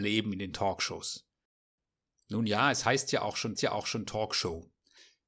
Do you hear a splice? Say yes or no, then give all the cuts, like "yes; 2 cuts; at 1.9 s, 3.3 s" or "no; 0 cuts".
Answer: yes; 1 cut; at 3.6 s